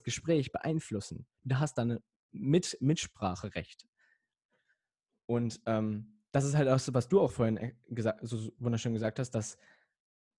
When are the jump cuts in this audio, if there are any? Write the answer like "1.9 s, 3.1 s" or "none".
none